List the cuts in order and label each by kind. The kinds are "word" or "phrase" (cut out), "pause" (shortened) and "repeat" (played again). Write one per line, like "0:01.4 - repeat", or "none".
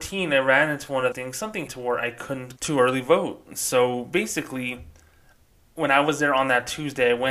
0:01.1 - word
0:01.7 - word
0:02.6 - word

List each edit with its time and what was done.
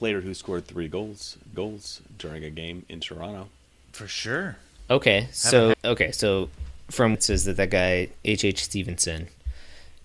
0:01.5 - repeat
0:03.7 - pause
0:05.7 - word
0:07.1 - word

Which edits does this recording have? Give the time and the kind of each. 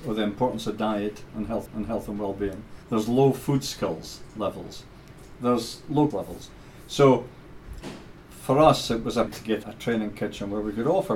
0:01.7 - repeat
0:02.8 - pause
0:06.1 - word
0:09.3 - word
0:09.6 - word

